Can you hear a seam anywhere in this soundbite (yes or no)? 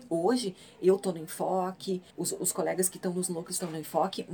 yes